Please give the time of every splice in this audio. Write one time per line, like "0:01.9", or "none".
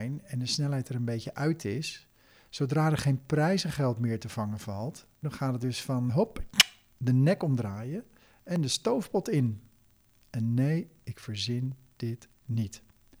0:05.2
0:06.1